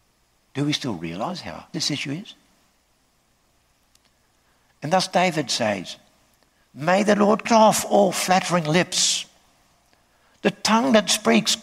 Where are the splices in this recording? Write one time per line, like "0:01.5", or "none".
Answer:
0:01.7
0:07.5